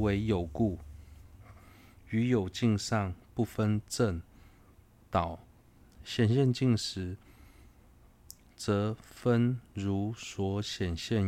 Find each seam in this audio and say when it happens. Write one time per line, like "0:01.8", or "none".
none